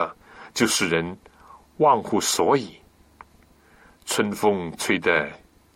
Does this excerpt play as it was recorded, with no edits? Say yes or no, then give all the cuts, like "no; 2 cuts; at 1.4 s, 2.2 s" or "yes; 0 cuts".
yes; 0 cuts